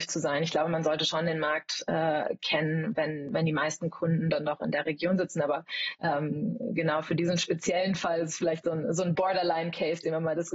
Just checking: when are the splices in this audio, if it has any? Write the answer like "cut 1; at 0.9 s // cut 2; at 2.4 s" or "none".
none